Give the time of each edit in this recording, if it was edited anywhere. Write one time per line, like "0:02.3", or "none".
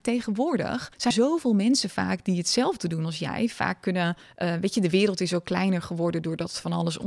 0:01.1